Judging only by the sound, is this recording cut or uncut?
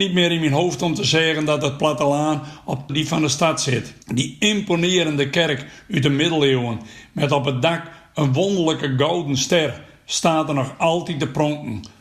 cut